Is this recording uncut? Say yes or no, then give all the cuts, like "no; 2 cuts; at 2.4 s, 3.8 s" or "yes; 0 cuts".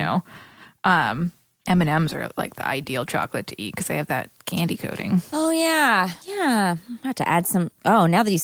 no; 2 cuts; at 1.7 s, 6.2 s